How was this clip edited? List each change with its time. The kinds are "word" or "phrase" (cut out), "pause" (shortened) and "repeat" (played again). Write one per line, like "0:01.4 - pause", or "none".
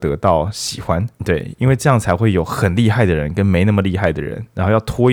0:01.1 - pause